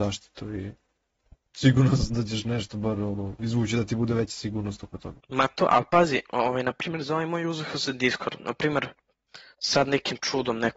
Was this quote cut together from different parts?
yes; 1 cut; at 5.2 s

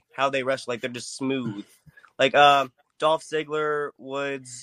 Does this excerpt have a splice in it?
no; 0 cuts

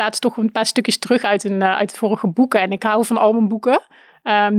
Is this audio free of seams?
yes; 0 cuts

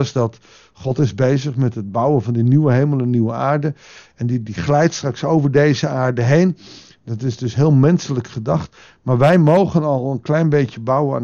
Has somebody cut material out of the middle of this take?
no; 0 cuts

